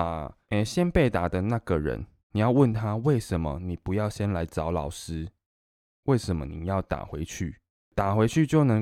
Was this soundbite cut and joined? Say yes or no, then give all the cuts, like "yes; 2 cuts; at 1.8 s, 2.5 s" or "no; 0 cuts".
no; 0 cuts